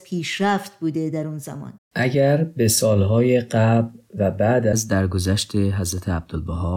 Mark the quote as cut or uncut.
cut